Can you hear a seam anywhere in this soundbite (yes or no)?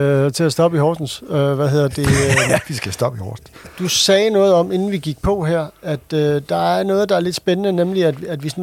no